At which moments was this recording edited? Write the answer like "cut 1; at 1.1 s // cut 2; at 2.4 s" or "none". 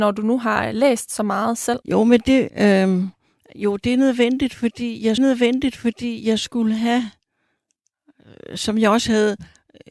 cut 1; at 1.8 s // cut 2; at 2.5 s // cut 3; at 5.2 s